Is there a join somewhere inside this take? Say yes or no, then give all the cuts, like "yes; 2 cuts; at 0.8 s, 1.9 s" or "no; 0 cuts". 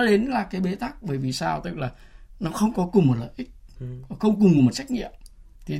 no; 0 cuts